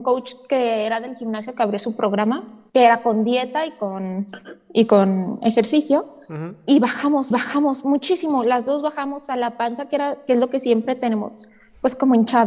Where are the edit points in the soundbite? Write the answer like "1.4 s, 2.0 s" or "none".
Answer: 2.7 s, 7.3 s